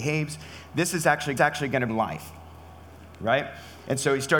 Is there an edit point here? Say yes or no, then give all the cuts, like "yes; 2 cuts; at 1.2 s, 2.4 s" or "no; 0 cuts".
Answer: yes; 2 cuts; at 1.4 s, 1.9 s